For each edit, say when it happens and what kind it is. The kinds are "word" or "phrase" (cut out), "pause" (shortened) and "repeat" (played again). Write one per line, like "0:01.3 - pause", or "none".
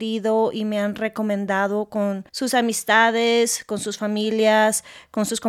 0:02.3 - pause